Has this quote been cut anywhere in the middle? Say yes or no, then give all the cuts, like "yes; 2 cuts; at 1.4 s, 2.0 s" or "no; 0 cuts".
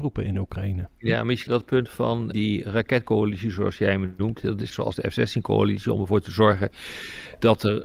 yes; 3 cuts; at 1.5 s, 2.3 s, 4.7 s